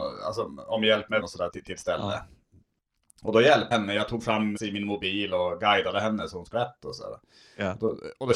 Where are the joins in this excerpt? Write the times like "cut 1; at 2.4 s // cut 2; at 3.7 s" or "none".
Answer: cut 1; at 1.2 s // cut 2; at 1.5 s // cut 3; at 3.7 s // cut 4; at 4.6 s // cut 5; at 6.5 s